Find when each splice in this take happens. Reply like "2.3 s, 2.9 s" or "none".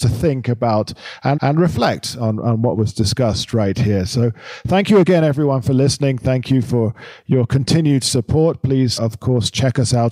1.4 s, 9.0 s